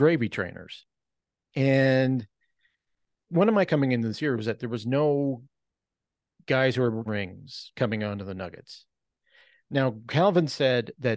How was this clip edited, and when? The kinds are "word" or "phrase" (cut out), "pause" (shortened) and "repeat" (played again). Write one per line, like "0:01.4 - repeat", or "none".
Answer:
0:03.3 - word
0:03.7 - word
0:07.1 - word